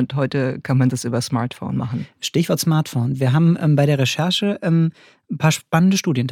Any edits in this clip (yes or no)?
no